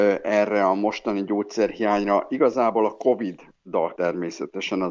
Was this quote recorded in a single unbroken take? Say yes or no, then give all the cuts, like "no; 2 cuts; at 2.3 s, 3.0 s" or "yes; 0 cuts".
no; 1 cut; at 4.0 s